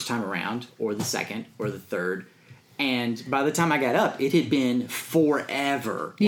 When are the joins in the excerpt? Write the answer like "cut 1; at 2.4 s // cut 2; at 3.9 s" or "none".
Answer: none